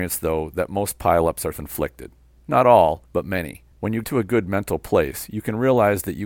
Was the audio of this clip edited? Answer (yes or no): yes